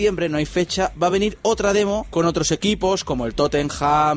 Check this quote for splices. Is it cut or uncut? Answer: uncut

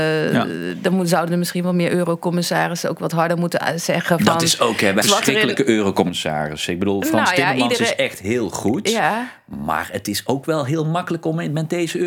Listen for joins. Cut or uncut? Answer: cut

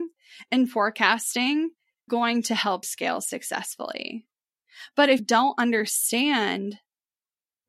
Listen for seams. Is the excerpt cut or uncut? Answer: cut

